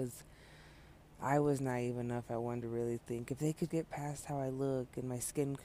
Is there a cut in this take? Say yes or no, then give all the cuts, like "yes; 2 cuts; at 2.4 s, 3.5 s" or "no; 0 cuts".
yes; 2 cuts; at 2.6 s, 3.7 s